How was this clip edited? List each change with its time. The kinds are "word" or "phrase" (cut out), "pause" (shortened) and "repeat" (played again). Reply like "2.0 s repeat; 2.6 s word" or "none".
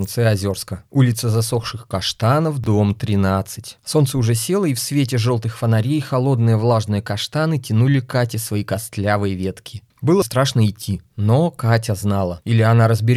10.2 s word